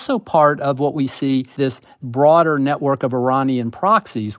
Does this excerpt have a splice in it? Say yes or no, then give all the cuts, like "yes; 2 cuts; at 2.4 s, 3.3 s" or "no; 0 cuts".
yes; 1 cut; at 1.6 s